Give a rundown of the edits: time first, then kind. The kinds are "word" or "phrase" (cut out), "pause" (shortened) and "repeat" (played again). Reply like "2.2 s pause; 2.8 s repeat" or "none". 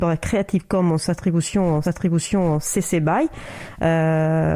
1.8 s repeat